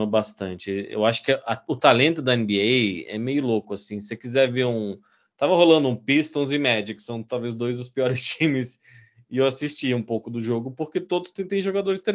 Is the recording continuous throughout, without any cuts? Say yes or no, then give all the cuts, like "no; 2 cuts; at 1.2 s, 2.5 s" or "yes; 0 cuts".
yes; 0 cuts